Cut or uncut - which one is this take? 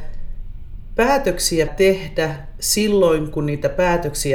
cut